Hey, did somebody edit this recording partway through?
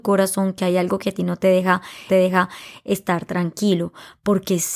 yes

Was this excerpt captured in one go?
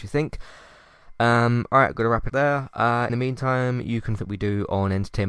no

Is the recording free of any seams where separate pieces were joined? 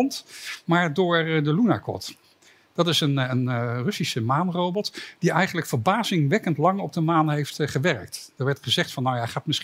yes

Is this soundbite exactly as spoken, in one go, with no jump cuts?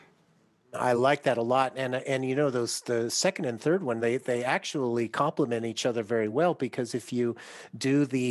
yes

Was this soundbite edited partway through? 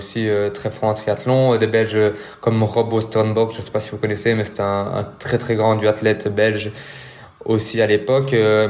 no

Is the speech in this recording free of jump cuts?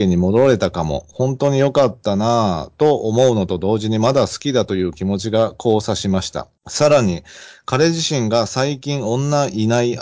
no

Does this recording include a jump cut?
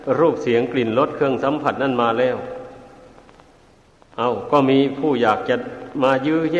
no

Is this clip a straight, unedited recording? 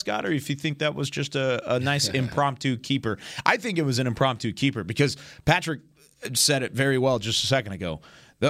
yes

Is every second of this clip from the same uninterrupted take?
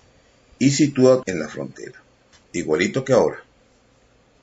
no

